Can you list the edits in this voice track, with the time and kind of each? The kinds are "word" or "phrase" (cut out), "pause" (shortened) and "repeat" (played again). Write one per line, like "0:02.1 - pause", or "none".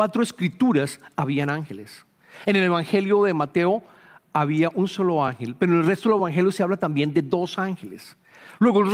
none